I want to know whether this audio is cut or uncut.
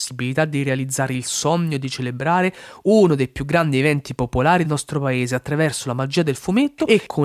cut